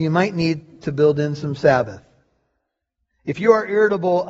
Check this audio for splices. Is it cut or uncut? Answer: uncut